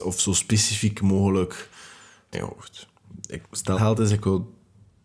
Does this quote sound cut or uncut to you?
cut